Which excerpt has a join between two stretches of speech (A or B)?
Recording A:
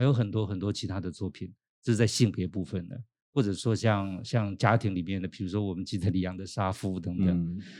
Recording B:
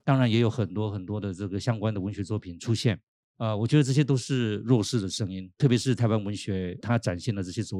B